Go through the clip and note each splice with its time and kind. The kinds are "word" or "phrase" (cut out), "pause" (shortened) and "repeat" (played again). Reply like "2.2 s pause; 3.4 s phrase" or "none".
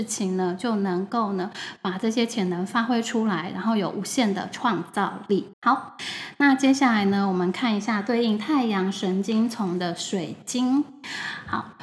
5.5 s pause